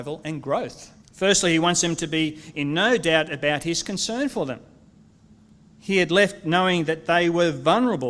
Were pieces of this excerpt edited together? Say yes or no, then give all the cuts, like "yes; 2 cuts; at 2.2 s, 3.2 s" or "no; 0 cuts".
yes; 1 cut; at 1.0 s